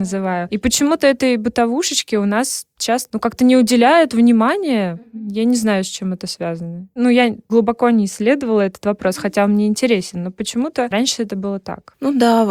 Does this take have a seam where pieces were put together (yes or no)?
no